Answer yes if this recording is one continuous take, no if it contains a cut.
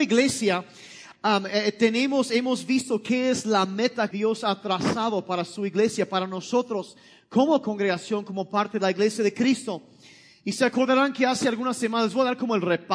no